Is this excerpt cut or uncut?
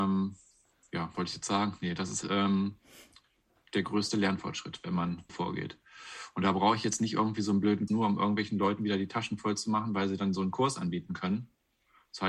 cut